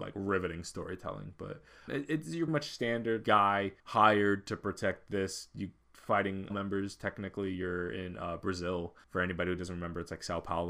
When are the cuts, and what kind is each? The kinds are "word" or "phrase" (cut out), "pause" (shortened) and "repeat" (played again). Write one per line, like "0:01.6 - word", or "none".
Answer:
0:01.9 - word
0:02.5 - word
0:03.2 - word
0:03.8 - pause
0:06.5 - phrase
0:09.0 - pause